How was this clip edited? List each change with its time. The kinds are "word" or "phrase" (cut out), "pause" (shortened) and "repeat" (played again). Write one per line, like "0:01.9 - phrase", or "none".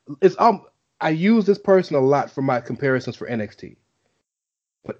none